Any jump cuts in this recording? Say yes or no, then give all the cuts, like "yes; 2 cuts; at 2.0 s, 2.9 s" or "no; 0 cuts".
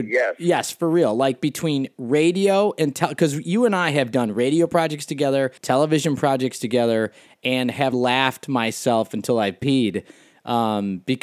yes; 2 cuts; at 5.6 s, 7.9 s